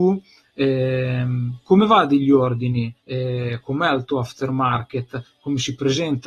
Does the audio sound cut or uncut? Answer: cut